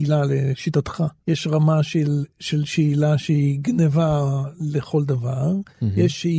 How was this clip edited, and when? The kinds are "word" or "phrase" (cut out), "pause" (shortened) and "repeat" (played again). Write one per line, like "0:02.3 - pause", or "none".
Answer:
0:01.2 - pause